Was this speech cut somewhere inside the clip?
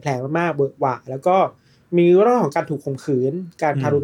no; 0 cuts

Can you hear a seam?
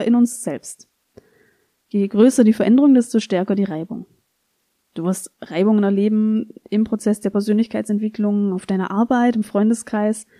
no; 0 cuts

